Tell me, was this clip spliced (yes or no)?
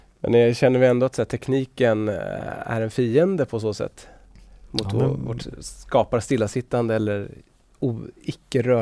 no